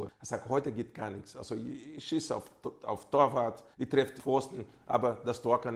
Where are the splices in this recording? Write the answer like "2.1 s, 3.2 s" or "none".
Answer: 3.7 s, 4.2 s